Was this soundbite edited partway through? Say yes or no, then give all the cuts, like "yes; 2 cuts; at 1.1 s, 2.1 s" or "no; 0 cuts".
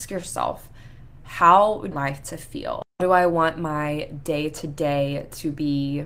yes; 1 cut; at 1.9 s